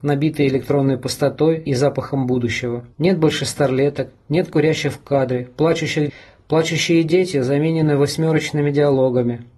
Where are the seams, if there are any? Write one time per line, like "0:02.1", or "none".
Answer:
0:01.7
0:02.9
0:06.1